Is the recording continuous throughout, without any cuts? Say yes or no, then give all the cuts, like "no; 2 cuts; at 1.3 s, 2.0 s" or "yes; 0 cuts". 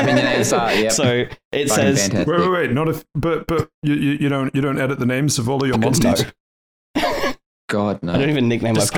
yes; 0 cuts